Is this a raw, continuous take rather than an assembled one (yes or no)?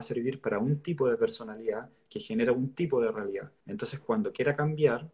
no